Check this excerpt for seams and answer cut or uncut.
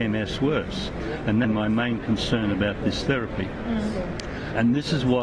cut